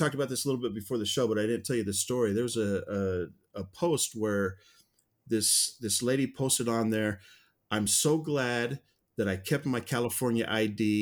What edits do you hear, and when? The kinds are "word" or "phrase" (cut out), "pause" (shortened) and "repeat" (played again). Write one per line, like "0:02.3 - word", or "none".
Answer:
none